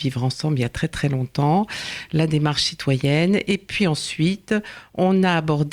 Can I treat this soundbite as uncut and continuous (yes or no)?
yes